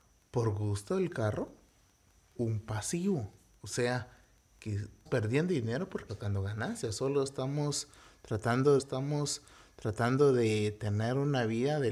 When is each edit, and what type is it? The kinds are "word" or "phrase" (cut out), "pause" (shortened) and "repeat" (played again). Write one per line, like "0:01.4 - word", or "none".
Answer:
0:02.4 - phrase
0:05.1 - word
0:06.1 - phrase
0:08.8 - repeat